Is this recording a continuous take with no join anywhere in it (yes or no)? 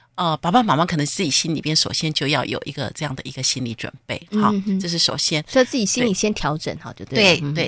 yes